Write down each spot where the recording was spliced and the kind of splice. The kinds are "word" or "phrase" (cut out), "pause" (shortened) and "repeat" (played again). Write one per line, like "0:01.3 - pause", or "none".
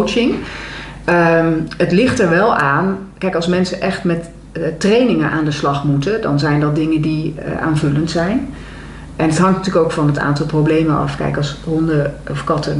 none